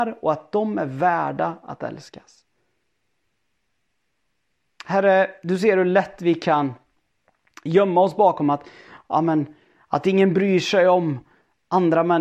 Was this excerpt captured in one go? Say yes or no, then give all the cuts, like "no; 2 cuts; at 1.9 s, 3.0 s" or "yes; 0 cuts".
yes; 0 cuts